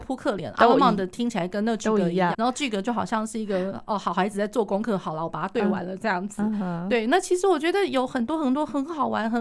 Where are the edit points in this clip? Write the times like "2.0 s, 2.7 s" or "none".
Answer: 2.3 s